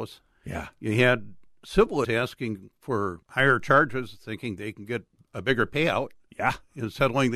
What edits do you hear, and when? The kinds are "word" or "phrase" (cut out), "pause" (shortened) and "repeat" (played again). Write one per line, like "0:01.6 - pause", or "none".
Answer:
0:02.0 - word
0:03.2 - pause
0:05.2 - pause